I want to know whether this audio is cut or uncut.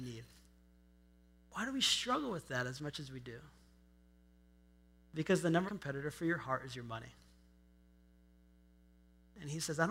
cut